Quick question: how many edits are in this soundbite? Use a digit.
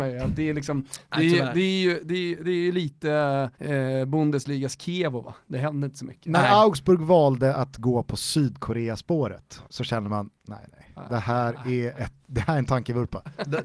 2